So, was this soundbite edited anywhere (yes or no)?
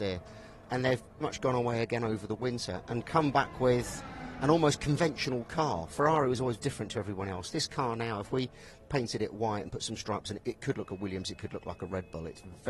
yes